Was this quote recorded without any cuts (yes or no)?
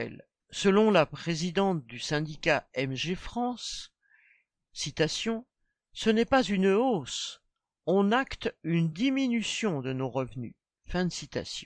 yes